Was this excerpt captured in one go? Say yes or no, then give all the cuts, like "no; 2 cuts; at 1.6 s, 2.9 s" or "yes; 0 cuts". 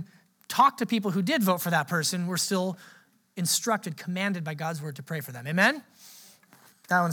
yes; 0 cuts